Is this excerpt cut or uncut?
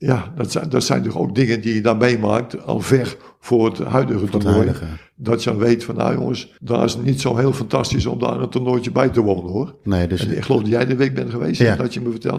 cut